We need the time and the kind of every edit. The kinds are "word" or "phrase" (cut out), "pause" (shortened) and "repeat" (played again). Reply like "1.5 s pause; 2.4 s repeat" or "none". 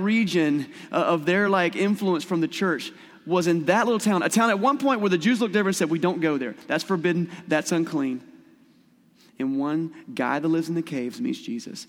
none